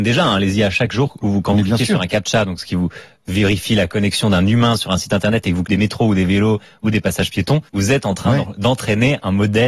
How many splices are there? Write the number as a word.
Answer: two